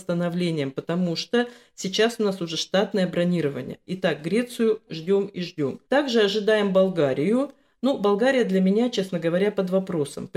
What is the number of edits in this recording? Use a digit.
2